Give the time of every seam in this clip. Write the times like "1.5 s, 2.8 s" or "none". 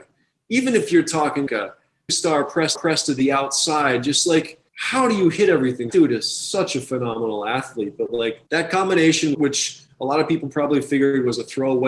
1.5 s, 2.1 s, 2.7 s, 4.7 s, 5.9 s, 8.5 s, 9.3 s